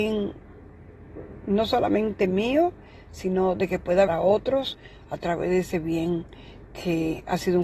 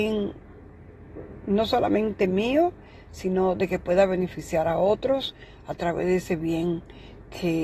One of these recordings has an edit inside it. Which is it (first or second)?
first